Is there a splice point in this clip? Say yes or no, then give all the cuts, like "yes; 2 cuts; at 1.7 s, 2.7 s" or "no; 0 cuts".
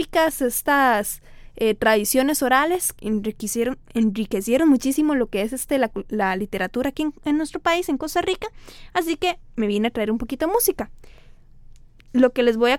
yes; 1 cut; at 3.0 s